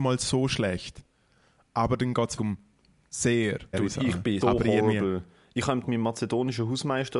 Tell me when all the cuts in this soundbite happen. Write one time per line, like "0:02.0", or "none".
0:02.4
0:03.7
0:04.4
0:05.8